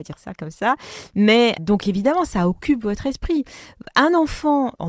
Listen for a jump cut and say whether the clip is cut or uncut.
cut